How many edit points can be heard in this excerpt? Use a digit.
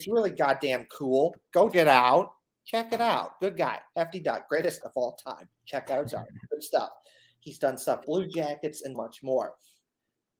4